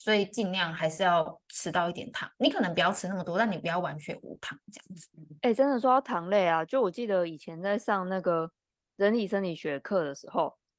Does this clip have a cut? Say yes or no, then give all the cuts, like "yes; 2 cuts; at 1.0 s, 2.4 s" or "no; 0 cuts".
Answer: no; 0 cuts